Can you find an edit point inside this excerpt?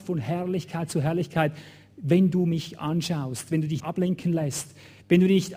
yes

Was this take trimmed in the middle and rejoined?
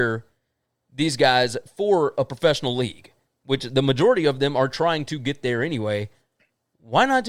no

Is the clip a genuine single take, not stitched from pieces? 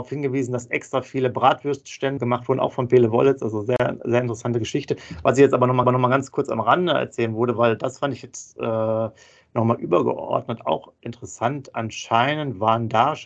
no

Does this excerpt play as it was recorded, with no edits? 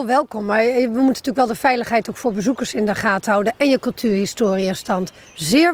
yes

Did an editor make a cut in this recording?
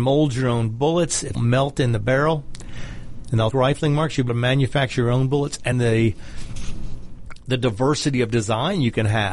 yes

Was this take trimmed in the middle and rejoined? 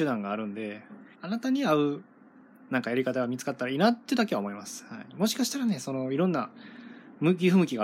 yes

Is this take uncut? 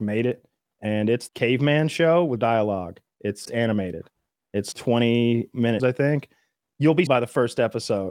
no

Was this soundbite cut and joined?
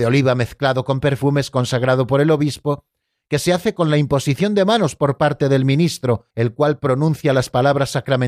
yes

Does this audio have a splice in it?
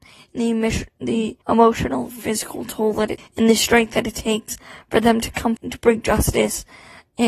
yes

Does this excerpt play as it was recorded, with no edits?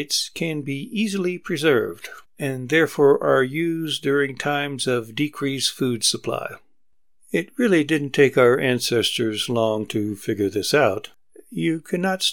yes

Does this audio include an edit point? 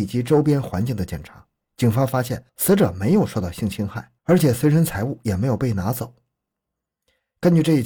yes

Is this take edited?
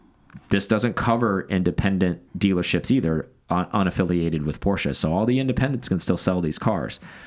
yes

